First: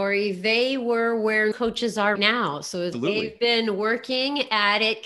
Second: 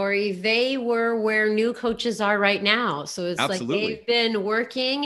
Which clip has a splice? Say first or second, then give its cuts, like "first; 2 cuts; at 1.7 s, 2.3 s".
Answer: first; 3 cuts; at 1.5 s, 2.2 s, 2.9 s